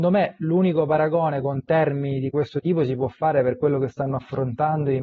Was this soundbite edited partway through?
no; 0 cuts

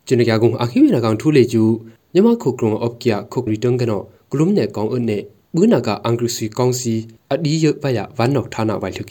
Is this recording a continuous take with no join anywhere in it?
no; 1 cut; at 3.5 s

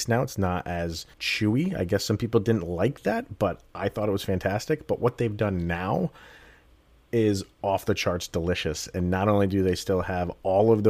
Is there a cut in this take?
yes; 1 cut; at 1.1 s

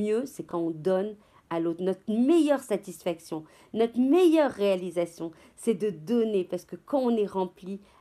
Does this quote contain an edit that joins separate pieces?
no; 0 cuts

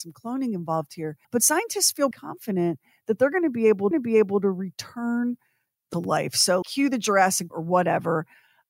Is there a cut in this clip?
yes; 6 cuts; at 1.2 s, 2.1 s, 3.9 s, 5.9 s, 6.6 s, 7.5 s

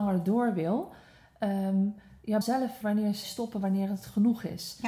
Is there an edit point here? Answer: yes; 3 cuts; at 2.4 s, 2.8 s, 3.2 s

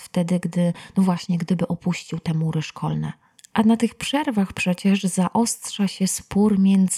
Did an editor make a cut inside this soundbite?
no; 0 cuts

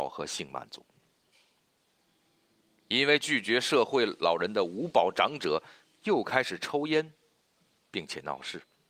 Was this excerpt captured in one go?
yes; 0 cuts

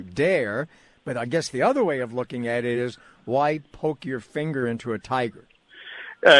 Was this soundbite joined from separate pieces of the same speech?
no; 0 cuts

